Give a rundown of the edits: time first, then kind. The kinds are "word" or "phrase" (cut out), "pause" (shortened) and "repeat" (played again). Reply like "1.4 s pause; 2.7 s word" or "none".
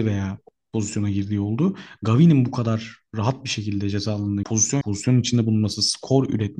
4.4 s word; 4.8 s word